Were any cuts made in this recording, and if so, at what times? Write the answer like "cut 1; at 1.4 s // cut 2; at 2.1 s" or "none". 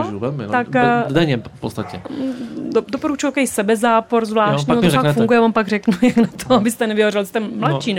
none